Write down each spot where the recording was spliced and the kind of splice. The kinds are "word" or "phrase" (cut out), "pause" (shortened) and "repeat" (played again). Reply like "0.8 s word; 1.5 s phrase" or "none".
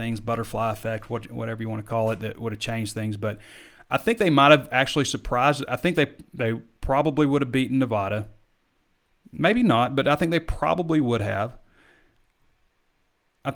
none